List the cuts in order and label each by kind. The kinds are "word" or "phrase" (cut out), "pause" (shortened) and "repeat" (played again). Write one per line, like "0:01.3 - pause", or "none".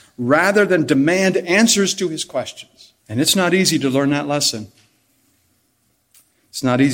0:03.0 - pause